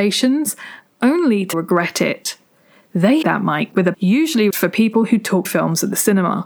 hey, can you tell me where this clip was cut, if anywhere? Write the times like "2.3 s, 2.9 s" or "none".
1.5 s, 3.2 s, 3.9 s, 4.5 s, 5.4 s